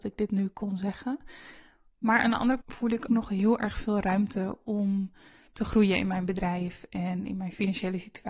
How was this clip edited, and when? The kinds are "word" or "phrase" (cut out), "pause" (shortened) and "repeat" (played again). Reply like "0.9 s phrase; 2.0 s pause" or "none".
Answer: 2.6 s word; 3.1 s word